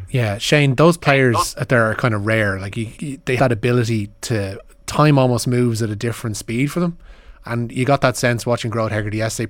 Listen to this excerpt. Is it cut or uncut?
cut